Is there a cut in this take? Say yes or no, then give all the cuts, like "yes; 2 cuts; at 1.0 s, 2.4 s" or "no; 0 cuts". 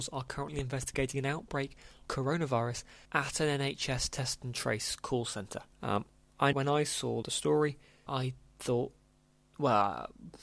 yes; 6 cuts; at 2.1 s, 3.1 s, 5.7 s, 6.5 s, 7.2 s, 8.1 s